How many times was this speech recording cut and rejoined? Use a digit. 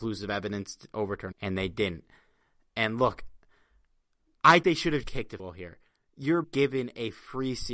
5